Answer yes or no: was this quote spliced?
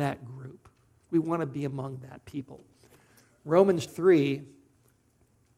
yes